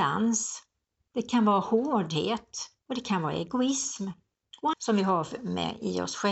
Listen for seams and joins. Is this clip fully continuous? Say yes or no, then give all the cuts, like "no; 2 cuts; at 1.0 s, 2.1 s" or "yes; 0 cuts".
no; 2 cuts; at 2.8 s, 4.7 s